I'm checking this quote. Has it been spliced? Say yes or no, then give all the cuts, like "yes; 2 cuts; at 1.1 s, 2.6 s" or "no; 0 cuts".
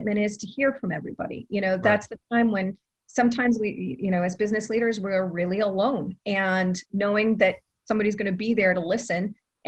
no; 0 cuts